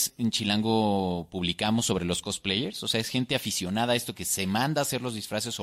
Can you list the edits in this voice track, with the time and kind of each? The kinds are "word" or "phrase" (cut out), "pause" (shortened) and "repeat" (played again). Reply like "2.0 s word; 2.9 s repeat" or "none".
none